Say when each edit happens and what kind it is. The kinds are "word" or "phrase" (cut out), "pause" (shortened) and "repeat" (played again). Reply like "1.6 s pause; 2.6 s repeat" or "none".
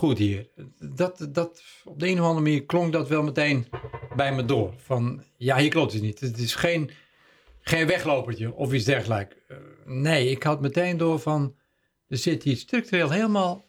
none